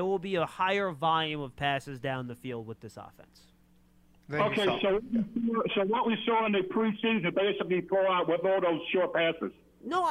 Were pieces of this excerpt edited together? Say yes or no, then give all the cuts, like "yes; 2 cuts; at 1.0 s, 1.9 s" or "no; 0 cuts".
no; 0 cuts